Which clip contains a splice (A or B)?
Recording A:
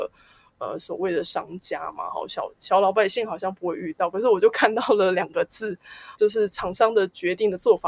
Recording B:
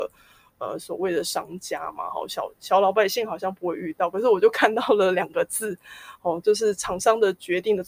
A